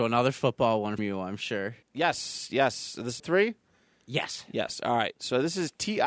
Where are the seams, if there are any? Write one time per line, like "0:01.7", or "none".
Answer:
0:01.0
0:01.8
0:03.2